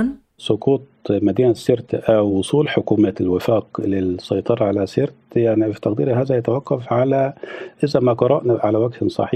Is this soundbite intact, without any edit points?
yes; 0 cuts

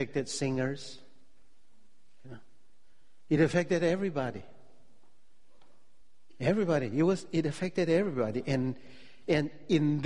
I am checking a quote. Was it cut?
no; 0 cuts

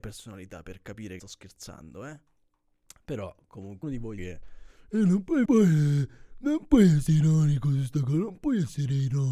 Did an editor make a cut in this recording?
yes; 4 cuts; at 1.2 s, 3.8 s, 4.2 s, 5.4 s

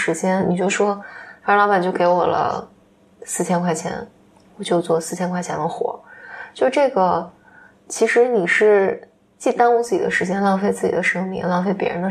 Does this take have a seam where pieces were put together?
no; 0 cuts

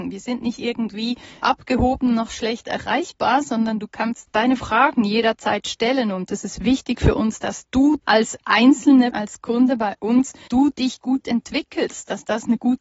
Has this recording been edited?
yes; 5 cuts; at 1.4 s, 4.3 s, 8.0 s, 9.1 s, 10.5 s

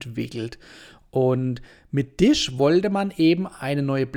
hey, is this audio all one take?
yes; 0 cuts

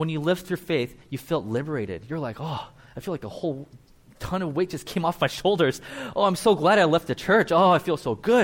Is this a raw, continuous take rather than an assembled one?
yes; 0 cuts

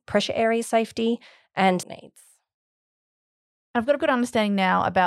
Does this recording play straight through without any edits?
no; 2 cuts; at 1.8 s, 4.0 s

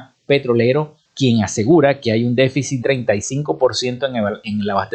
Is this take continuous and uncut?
no; 2 cuts; at 1.1 s, 2.8 s

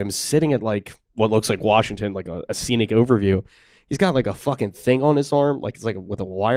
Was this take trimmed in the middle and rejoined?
no; 0 cuts

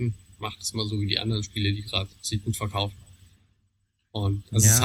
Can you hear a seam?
no; 0 cuts

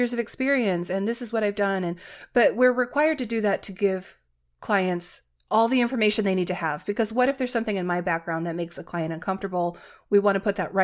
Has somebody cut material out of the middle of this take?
no; 0 cuts

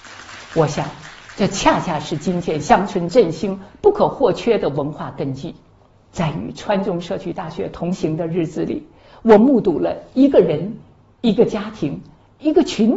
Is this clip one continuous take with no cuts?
yes; 0 cuts

